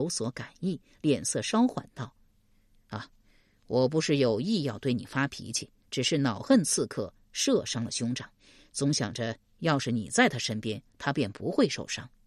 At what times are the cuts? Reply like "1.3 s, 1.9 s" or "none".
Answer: none